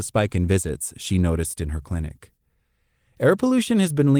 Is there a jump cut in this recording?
no; 0 cuts

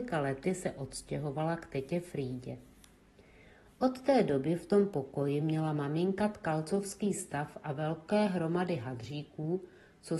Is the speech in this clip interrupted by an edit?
no; 0 cuts

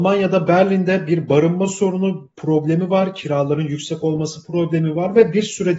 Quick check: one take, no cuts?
yes; 0 cuts

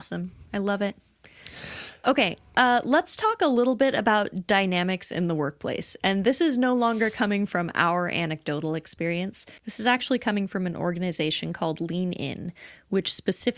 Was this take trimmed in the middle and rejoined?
yes; 1 cut; at 9.6 s

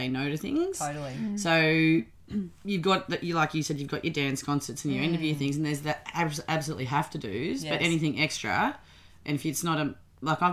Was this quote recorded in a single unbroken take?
yes; 0 cuts

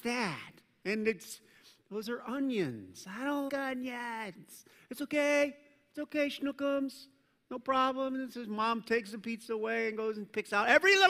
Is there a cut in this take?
yes; 1 cut; at 3.5 s

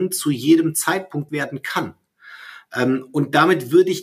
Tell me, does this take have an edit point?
yes; 1 cut; at 1.3 s

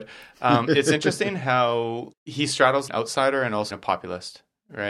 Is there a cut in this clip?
yes; 3 cuts; at 2.1 s, 2.9 s, 3.7 s

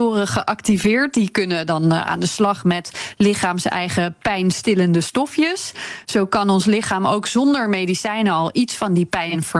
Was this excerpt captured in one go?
yes; 0 cuts

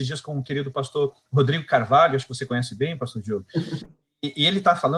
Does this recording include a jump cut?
no; 0 cuts

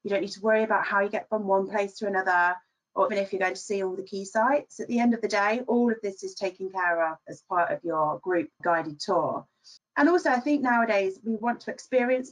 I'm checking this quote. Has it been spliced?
yes; 3 cuts; at 3.1 s, 8.6 s, 9.8 s

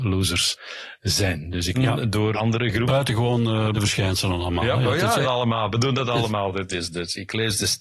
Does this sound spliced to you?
yes; 4 cuts; at 1.7 s, 2.3 s, 3.7 s, 5.2 s

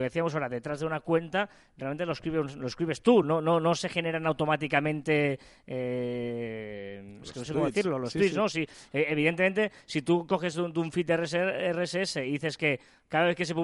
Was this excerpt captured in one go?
yes; 0 cuts

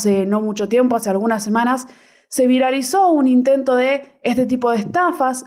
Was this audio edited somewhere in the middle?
no; 0 cuts

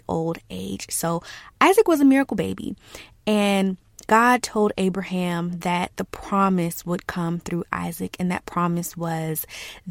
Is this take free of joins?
no; 1 cut; at 4.0 s

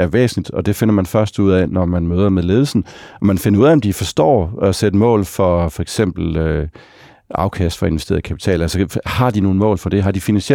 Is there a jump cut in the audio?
no; 0 cuts

